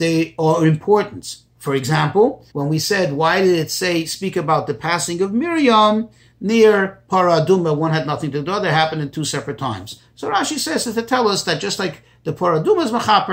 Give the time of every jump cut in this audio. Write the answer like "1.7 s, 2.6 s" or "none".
2.5 s